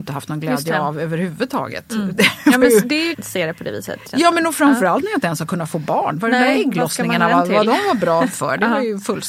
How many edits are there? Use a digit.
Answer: 1